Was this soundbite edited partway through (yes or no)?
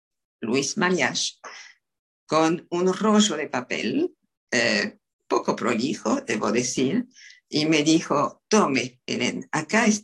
no